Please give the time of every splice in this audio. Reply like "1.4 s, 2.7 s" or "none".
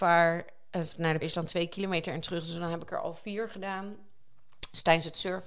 1.2 s